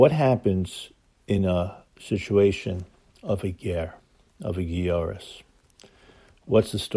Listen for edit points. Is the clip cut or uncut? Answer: uncut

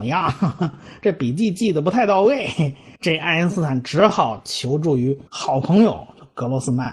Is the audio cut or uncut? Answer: cut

